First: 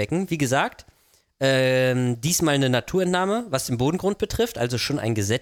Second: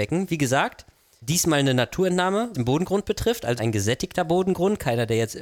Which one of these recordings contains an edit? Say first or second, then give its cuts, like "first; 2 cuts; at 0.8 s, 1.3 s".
second; 3 cuts; at 1.2 s, 2.5 s, 3.6 s